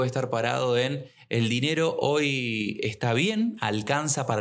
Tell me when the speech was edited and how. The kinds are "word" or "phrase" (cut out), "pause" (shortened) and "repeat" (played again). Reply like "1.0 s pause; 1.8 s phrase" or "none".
none